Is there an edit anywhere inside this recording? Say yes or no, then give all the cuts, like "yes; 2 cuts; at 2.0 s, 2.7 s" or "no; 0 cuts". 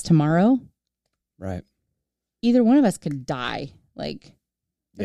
no; 0 cuts